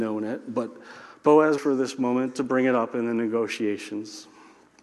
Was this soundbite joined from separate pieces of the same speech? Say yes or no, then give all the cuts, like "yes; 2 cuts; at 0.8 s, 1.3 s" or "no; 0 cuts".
yes; 1 cut; at 1.6 s